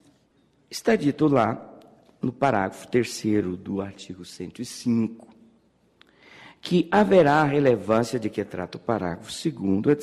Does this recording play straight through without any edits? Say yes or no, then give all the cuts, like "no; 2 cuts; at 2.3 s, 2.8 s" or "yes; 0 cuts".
yes; 0 cuts